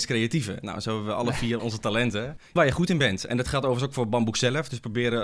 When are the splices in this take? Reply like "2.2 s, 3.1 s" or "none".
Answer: 1.6 s, 2.6 s